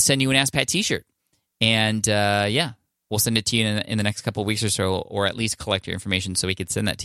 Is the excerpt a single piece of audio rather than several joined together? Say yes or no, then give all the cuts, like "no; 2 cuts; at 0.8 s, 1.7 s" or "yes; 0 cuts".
yes; 0 cuts